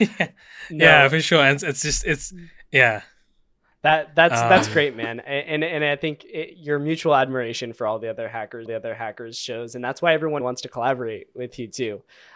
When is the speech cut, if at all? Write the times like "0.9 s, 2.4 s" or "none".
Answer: 8.7 s, 10.4 s